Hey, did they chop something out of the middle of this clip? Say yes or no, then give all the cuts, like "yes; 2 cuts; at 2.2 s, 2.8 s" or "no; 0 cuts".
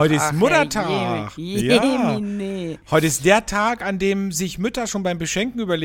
no; 0 cuts